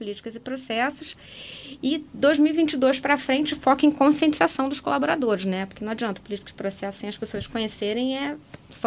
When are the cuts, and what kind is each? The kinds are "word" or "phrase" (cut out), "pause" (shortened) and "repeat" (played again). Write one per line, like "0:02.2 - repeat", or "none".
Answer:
none